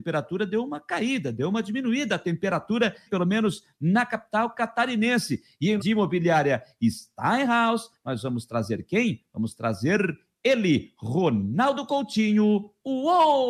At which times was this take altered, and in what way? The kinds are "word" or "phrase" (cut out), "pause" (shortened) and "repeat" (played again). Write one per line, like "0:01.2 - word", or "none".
0:03.1 - word
0:05.8 - word

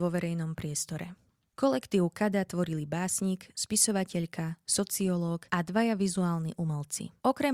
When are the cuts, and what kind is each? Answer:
none

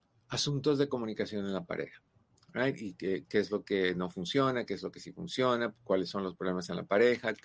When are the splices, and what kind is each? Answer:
none

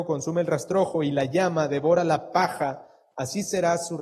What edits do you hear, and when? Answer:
none

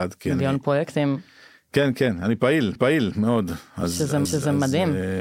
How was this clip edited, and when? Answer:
0:02.8 - repeat
0:04.3 - repeat

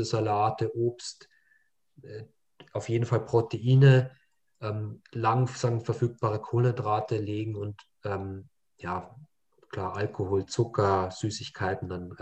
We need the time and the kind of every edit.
none

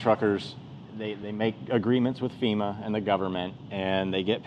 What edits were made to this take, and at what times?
none

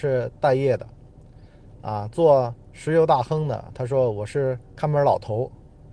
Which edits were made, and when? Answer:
0:04.6 - pause

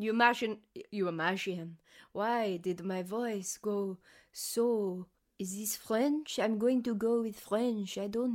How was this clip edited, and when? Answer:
none

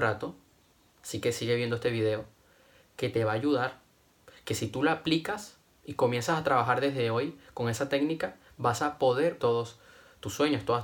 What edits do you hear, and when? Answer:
0:09.4 - word

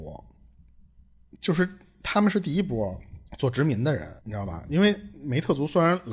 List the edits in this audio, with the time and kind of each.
0:03.3 - pause
0:04.2 - pause

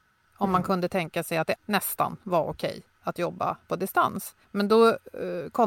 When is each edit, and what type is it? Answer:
0:01.6 - word
0:04.4 - pause

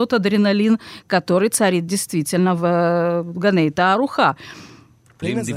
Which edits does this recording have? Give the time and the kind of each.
none

